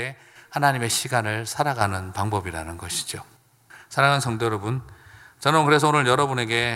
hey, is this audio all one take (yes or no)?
yes